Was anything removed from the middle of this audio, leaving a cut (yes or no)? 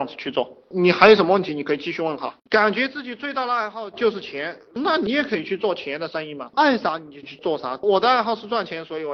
yes